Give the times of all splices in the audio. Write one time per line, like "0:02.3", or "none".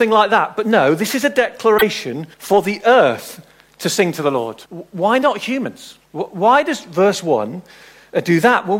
0:02.3
0:04.7
0:06.0